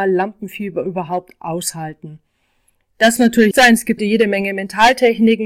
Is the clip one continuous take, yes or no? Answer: no